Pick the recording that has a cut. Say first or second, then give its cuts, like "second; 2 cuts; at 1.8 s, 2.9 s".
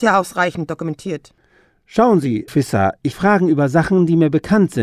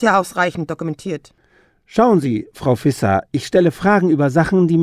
first; 2 cuts; at 2.5 s, 3.1 s